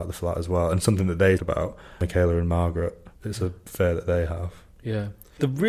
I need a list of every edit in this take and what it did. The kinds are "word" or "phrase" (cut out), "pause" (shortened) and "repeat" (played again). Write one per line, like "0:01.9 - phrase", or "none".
0:01.4 - word
0:03.1 - pause